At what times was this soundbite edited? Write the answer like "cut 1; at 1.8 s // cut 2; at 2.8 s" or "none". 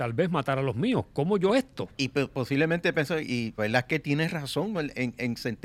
cut 1; at 1.5 s // cut 2; at 1.9 s // cut 3; at 3.6 s // cut 4; at 4.7 s